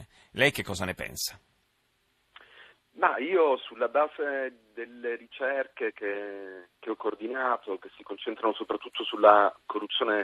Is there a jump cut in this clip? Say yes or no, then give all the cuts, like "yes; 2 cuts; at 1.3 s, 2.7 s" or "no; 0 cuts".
no; 0 cuts